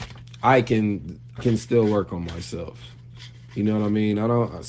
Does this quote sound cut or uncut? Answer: cut